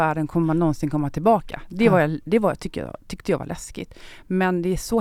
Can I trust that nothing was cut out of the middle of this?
yes; 0 cuts

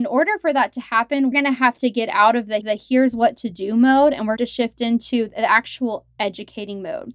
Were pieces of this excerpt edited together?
yes; 3 cuts; at 1.3 s, 2.6 s, 4.4 s

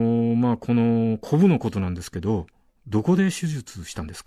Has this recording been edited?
yes; 1 cut; at 2.6 s

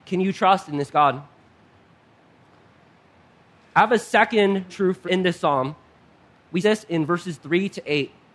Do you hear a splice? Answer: yes; 3 cuts; at 4.7 s, 5.0 s, 6.6 s

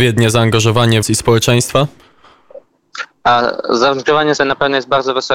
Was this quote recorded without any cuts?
no; 2 cuts; at 1.0 s, 4.4 s

